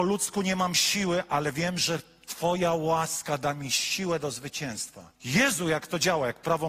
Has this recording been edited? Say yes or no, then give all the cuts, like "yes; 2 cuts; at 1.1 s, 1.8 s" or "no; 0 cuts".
yes; 1 cut; at 5.2 s